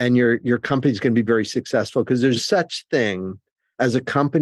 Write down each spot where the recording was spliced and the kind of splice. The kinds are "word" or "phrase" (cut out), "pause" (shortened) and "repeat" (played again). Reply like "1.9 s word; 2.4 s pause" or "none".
2.4 s word